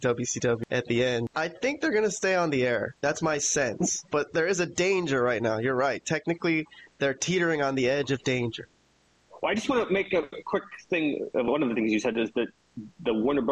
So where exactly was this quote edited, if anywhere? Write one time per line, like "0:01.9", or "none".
none